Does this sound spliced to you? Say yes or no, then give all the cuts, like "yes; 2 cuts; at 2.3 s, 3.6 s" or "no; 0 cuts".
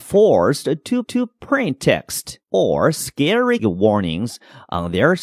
yes; 3 cuts; at 1.0 s, 2.4 s, 3.6 s